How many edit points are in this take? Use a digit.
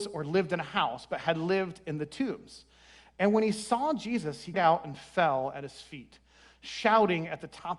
1